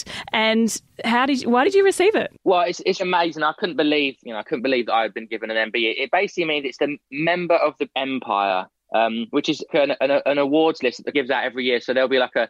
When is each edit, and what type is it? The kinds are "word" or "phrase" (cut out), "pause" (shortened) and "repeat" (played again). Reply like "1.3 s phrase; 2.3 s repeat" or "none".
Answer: 3.0 s word; 4.2 s word; 7.9 s word; 9.7 s word; 11.1 s word